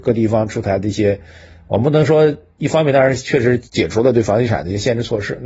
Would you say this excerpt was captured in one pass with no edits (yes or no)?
no